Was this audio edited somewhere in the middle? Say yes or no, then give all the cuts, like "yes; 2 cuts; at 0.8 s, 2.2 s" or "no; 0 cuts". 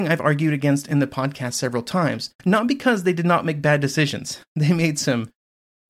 yes; 1 cut; at 2.3 s